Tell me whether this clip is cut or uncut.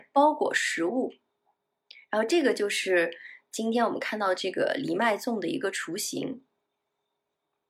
uncut